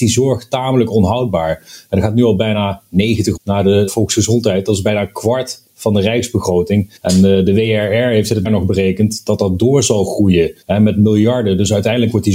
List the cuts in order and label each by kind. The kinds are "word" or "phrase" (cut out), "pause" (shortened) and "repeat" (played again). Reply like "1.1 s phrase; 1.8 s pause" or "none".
3.4 s word; 3.9 s word; 7.0 s pause; 8.5 s word; 10.6 s pause